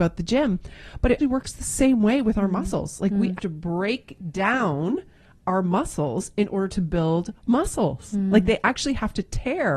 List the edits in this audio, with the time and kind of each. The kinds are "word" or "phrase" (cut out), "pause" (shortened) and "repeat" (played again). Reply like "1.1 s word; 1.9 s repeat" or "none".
1.2 s word; 3.4 s word